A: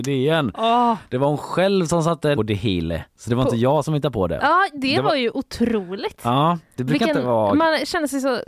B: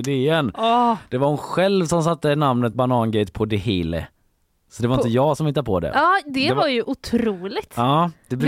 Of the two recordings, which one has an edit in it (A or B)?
A